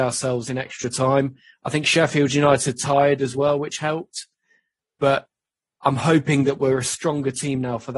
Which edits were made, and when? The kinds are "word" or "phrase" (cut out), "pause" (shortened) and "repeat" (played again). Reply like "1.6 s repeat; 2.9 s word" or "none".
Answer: none